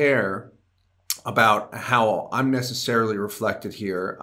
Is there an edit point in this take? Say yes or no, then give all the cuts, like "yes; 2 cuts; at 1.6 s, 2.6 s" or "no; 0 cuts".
no; 0 cuts